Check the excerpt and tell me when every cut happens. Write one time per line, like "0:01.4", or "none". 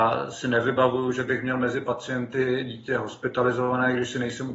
none